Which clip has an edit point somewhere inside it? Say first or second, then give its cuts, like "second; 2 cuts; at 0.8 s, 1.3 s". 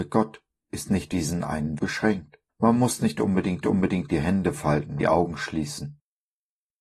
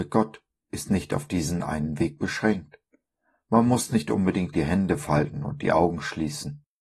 first; 5 cuts; at 1.1 s, 1.8 s, 2.5 s, 3.6 s, 5.0 s